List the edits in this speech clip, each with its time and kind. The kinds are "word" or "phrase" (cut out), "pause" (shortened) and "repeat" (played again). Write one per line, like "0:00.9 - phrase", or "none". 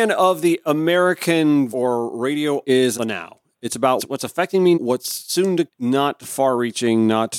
0:01.7 - word
0:02.6 - word
0:02.9 - word
0:04.0 - word
0:04.7 - word
0:05.7 - word